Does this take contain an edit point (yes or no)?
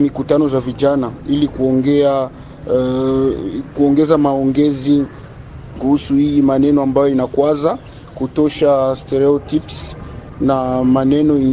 no